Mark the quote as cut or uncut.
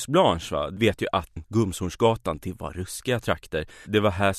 cut